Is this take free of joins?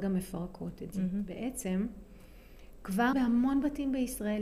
no; 1 cut; at 3.1 s

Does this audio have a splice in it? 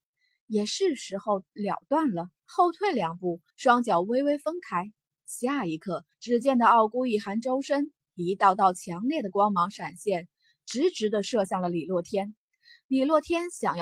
yes; 3 cuts; at 2.4 s, 3.5 s, 6.1 s

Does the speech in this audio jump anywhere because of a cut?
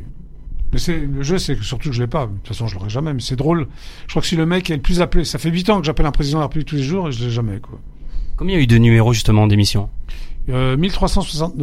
no; 0 cuts

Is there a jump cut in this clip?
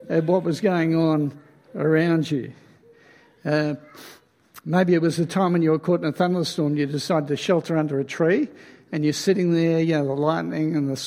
no; 0 cuts

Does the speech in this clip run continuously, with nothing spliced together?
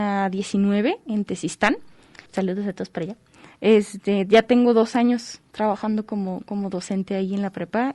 no; 1 cut; at 2.3 s

